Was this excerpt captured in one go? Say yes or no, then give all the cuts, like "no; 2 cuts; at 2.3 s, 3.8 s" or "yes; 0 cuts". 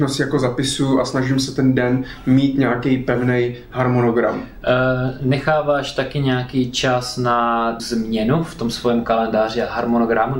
no; 1 cut; at 7.8 s